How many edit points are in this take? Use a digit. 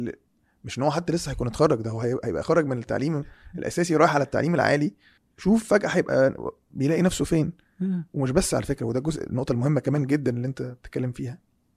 1